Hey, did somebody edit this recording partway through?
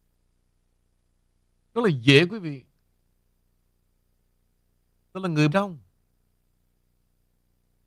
yes; 1 cut; at 5.5 s

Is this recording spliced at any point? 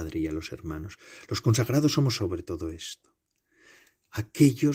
no; 0 cuts

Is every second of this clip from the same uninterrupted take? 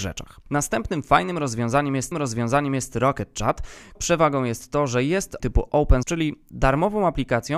no; 4 cuts; at 2.1 s, 4.0 s, 5.4 s, 6.0 s

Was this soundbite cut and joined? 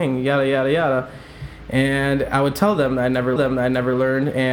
yes; 1 cut; at 3.4 s

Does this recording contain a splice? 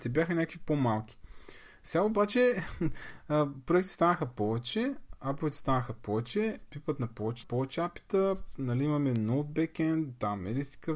yes; 1 cut; at 7.4 s

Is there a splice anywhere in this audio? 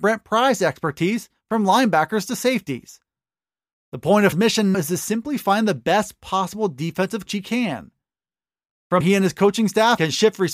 yes; 4 cuts; at 4.3 s, 4.7 s, 7.3 s, 9.0 s

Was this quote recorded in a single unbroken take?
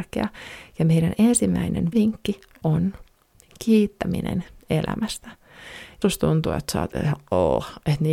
no; 2 cuts; at 1.9 s, 6.0 s

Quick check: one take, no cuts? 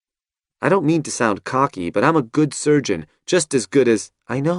yes; 0 cuts

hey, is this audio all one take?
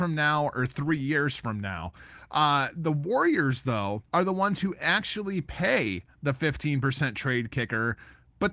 no; 1 cut; at 4.1 s

